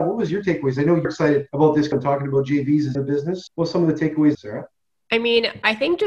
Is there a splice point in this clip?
yes; 6 cuts; at 1.0 s, 1.5 s, 1.9 s, 2.9 s, 3.5 s, 4.3 s

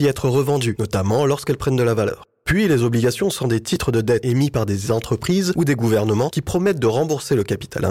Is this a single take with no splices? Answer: yes; 0 cuts

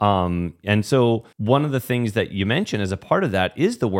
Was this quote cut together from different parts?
yes; 1 cut; at 1.3 s

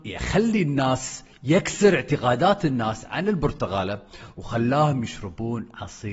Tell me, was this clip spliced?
no; 0 cuts

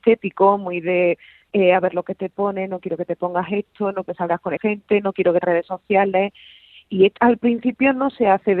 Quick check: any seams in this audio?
yes; 4 cuts; at 4.0 s, 4.6 s, 5.4 s, 7.2 s

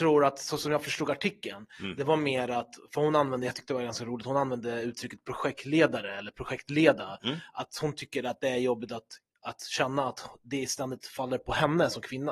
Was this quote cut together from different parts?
no; 0 cuts

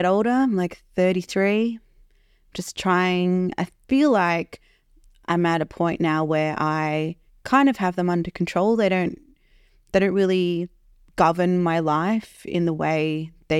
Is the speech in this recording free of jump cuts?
no; 1 cut; at 7.3 s

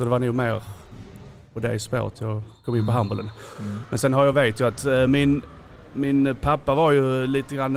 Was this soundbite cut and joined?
no; 0 cuts

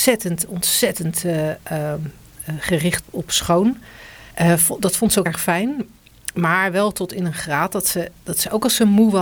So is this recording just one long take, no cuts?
no; 3 cuts; at 3.0 s, 4.3 s, 5.3 s

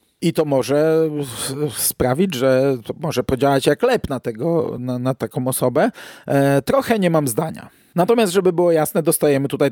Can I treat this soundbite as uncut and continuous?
yes; 0 cuts

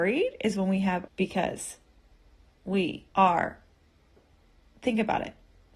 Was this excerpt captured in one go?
no; 2 cuts; at 1.1 s, 3.1 s

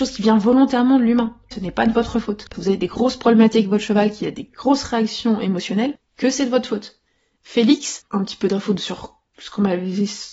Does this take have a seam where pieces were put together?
yes; 4 cuts; at 1.5 s, 2.5 s, 8.1 s, 9.3 s

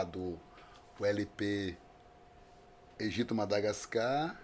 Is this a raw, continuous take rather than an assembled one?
yes; 0 cuts

